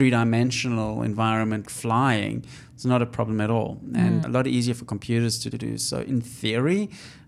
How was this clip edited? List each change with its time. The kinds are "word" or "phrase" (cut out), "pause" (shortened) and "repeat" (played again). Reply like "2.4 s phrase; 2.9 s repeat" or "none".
1.6 s word; 4.2 s word; 5.5 s phrase